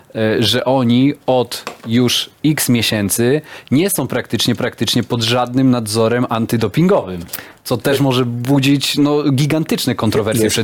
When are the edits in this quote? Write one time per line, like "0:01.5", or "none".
0:04.6
0:07.6